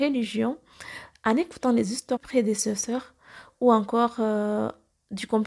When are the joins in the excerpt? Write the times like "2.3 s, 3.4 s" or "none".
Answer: 2.2 s